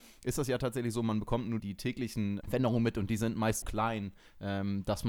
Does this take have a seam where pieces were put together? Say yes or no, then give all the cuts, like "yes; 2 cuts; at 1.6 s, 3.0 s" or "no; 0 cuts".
yes; 3 cuts; at 1.6 s, 2.4 s, 3.6 s